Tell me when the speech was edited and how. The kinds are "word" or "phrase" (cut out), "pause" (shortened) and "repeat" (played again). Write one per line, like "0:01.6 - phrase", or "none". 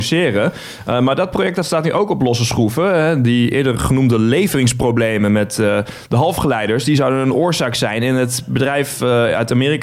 none